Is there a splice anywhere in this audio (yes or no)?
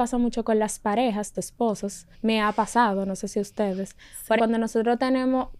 yes